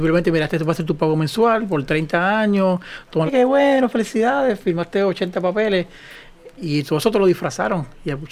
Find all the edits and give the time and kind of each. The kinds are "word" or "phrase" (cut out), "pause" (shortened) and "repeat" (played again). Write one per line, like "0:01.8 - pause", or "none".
0:03.3 - phrase